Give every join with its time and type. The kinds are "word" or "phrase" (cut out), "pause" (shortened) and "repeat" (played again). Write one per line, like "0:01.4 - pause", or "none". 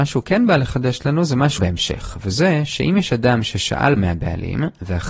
0:01.6 - word
0:04.0 - word